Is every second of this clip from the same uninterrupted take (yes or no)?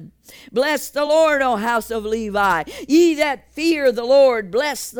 yes